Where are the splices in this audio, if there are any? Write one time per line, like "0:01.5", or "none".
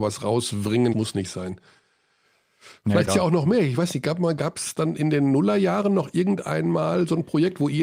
0:00.9
0:03.1